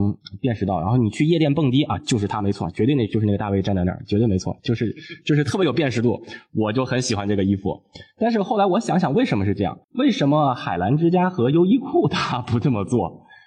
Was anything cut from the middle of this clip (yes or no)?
yes